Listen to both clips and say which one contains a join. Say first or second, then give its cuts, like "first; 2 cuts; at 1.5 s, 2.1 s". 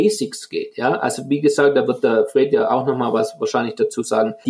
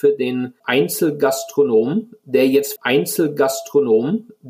second; 1 cut; at 2.8 s